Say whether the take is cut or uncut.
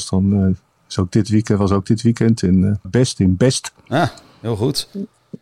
cut